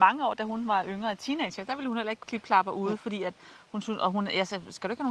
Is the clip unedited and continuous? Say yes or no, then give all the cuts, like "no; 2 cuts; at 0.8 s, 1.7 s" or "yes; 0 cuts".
no; 1 cut; at 2.2 s